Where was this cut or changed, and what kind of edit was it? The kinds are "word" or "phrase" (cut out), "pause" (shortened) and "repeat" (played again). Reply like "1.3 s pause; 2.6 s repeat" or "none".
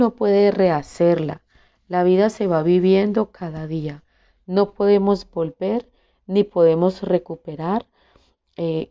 none